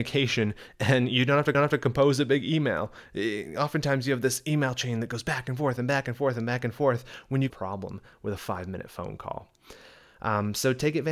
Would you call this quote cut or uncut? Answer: cut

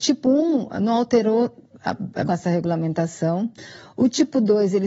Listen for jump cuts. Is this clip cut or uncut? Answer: cut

